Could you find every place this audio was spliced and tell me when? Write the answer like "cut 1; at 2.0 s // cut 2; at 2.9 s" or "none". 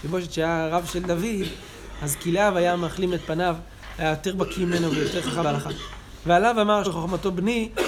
cut 1; at 5.4 s // cut 2; at 6.8 s